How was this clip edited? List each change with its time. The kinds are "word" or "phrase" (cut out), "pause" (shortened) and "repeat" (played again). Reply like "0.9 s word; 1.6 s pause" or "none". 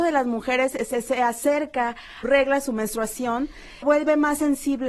2.2 s phrase; 3.8 s word